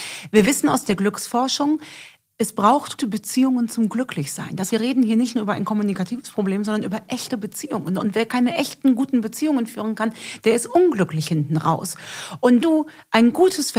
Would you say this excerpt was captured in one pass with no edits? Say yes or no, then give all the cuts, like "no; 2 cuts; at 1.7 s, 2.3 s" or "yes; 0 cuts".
no; 3 cuts; at 3.0 s, 4.7 s, 12.6 s